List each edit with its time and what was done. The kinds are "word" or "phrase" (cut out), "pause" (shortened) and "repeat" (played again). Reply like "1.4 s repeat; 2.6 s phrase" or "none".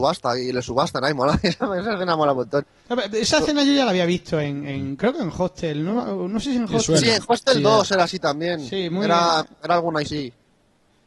10.0 s word